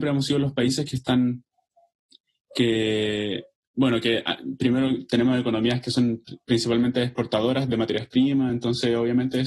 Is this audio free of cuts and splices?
yes; 0 cuts

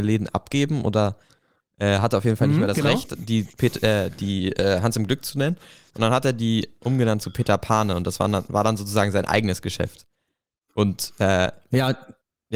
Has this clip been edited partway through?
no; 0 cuts

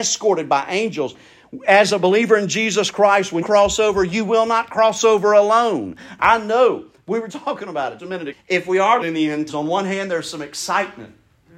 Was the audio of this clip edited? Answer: yes; 6 cuts; at 3.4 s, 7.3 s, 8.0 s, 8.3 s, 9.0 s, 9.5 s

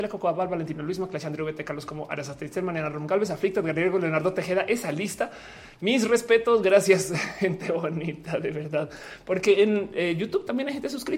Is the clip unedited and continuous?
yes; 0 cuts

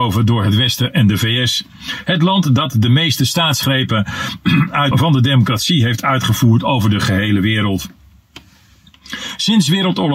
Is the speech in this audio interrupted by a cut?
yes; 1 cut; at 4.9 s

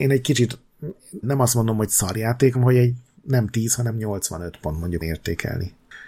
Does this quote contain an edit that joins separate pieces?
yes; 3 cuts; at 1.2 s, 2.5 s, 5.0 s

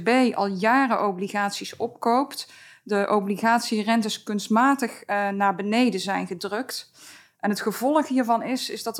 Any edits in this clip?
no; 0 cuts

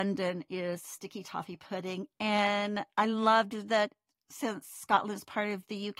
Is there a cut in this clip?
no; 0 cuts

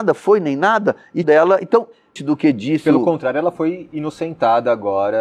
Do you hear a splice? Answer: yes; 2 cuts; at 1.2 s, 2.2 s

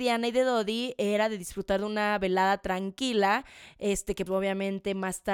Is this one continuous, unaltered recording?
no; 1 cut; at 4.3 s

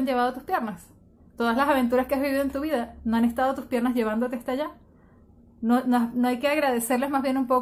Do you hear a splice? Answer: no; 0 cuts

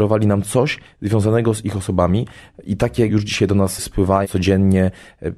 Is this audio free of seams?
no; 2 cuts; at 3.1 s, 4.2 s

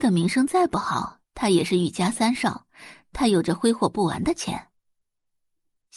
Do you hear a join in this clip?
yes; 1 cut; at 1.3 s

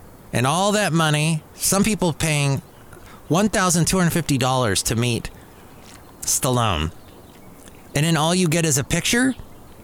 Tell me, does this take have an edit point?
no; 0 cuts

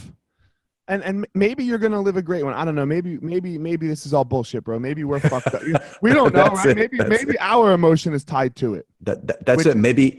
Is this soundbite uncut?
no; 1 cut; at 8.9 s

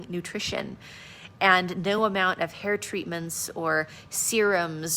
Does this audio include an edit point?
no; 0 cuts

